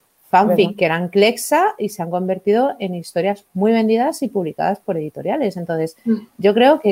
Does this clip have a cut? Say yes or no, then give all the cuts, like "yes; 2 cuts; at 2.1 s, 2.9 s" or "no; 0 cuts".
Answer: no; 0 cuts